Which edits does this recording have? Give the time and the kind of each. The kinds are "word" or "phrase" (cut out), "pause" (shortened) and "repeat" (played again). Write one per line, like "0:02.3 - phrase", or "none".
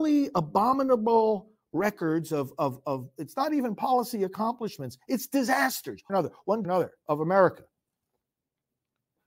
0:06.1 - phrase
0:06.6 - phrase
0:07.0 - pause